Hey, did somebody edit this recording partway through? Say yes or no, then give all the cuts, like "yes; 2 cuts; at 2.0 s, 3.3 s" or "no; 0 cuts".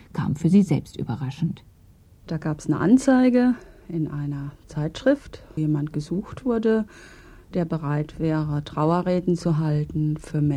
yes; 1 cut; at 5.6 s